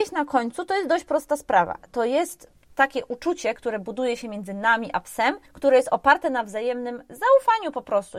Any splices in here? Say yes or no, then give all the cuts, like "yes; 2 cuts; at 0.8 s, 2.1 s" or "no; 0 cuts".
yes; 2 cuts; at 2.6 s, 5.5 s